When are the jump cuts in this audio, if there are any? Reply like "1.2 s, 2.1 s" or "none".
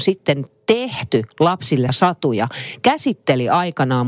1.9 s